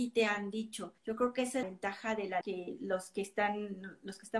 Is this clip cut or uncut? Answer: cut